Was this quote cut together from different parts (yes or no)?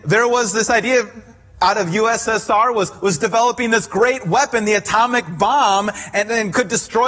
no